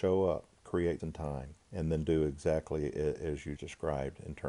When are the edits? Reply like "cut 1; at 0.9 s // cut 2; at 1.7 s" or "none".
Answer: cut 1; at 1.0 s // cut 2; at 1.6 s // cut 3; at 3.6 s